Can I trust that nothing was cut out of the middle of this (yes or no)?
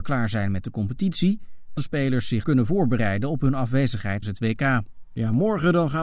no